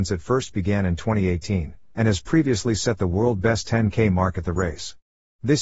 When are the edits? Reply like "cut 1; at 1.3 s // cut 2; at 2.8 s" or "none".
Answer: none